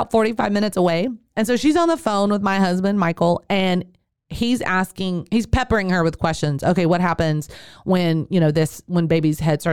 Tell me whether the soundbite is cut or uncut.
uncut